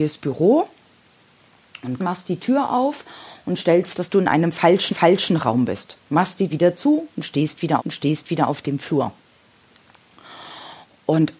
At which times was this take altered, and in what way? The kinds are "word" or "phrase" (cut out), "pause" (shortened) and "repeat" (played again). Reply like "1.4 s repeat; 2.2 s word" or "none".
2.0 s word; 3.9 s word; 4.9 s repeat; 6.0 s pause; 6.5 s word; 7.8 s repeat